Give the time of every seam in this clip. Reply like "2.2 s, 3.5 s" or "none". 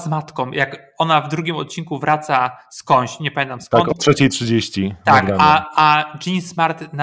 none